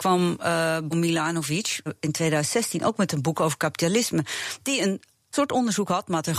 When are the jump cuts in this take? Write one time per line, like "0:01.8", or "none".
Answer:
0:00.9
0:01.9
0:05.3